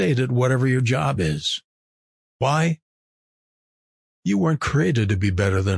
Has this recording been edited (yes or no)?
no